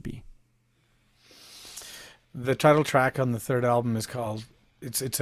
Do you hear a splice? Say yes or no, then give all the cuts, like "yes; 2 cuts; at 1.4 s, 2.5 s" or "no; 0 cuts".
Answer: no; 0 cuts